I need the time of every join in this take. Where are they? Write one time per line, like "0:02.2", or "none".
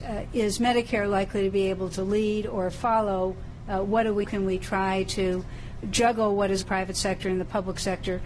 0:04.2
0:05.8
0:06.6

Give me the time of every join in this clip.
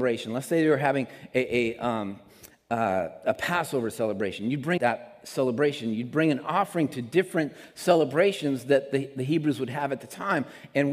0:04.8

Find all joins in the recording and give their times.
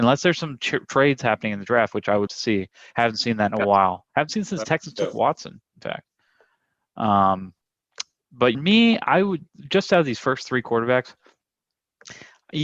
0:02.3
0:08.5

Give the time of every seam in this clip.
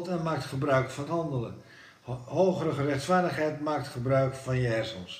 0:01.1

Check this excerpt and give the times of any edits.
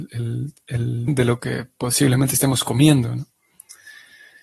0:01.1

